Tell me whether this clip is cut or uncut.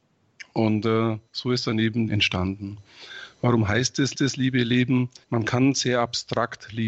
cut